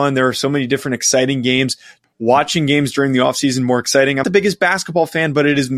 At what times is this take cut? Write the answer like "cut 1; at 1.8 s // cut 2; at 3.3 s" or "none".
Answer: cut 1; at 2.0 s // cut 2; at 4.2 s